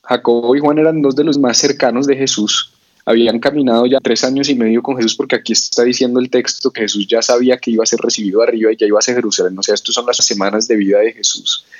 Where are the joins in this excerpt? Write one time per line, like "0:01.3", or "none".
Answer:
0:01.3
0:04.0
0:10.2